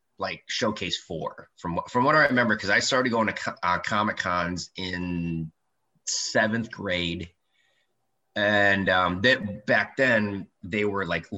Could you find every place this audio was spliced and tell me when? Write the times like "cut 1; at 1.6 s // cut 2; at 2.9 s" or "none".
none